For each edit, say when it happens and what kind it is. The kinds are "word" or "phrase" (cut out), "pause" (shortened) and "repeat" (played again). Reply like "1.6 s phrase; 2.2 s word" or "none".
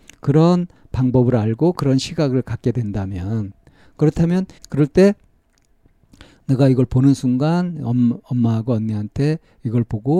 4.6 s phrase